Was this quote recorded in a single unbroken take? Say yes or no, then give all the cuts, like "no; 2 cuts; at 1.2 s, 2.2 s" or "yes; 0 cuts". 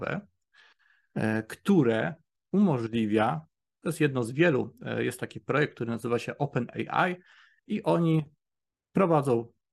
yes; 0 cuts